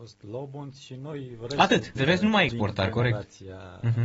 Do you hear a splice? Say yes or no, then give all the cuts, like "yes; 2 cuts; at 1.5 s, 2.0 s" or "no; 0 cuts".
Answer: yes; 2 cuts; at 2.0 s, 2.5 s